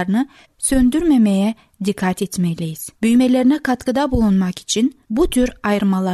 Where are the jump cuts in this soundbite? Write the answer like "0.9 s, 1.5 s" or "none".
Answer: 3.0 s, 5.0 s